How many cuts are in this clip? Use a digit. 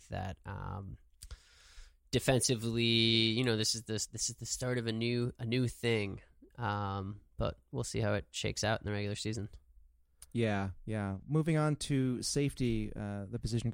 0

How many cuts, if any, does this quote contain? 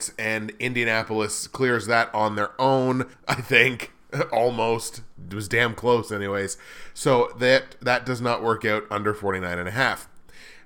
1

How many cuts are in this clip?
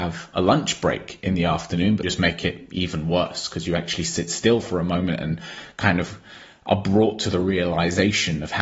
1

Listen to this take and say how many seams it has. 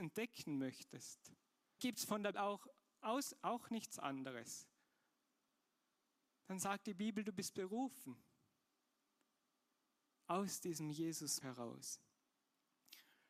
3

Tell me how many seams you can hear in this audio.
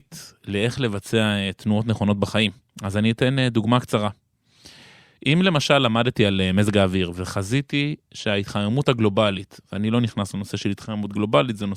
0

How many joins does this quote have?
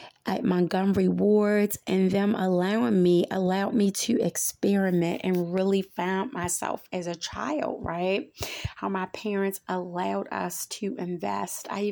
0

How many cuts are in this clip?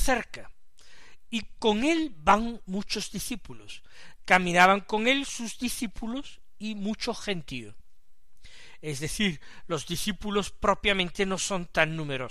0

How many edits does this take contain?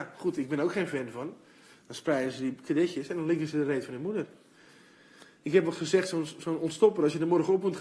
0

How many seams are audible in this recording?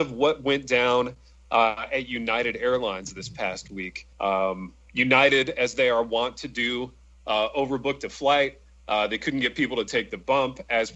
1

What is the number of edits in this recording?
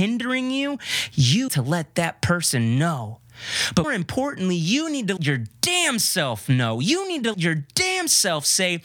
4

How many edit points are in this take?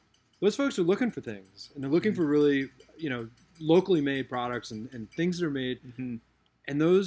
0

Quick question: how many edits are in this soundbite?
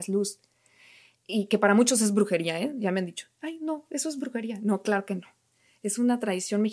0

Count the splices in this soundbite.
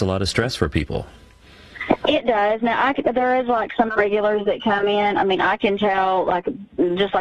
1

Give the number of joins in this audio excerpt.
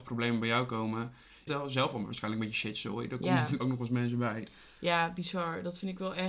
2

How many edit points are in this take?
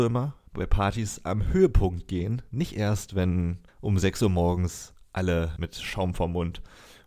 2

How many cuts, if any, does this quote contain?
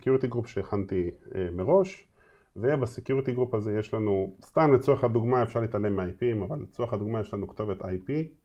0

